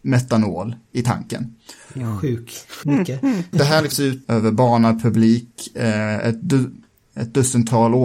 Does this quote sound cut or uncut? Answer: cut